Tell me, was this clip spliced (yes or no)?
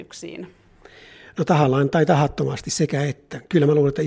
no